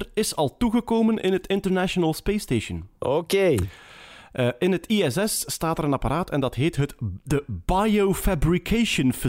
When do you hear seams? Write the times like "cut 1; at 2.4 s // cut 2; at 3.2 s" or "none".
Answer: none